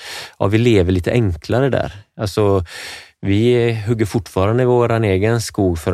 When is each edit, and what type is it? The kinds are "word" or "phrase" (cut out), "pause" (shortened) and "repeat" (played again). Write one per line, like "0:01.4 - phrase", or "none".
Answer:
none